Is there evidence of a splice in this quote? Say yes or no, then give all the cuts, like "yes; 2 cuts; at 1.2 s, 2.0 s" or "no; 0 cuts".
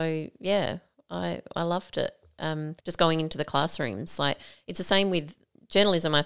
yes; 1 cut; at 2.8 s